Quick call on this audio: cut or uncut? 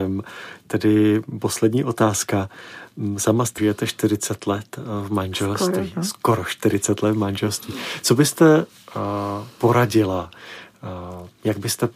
cut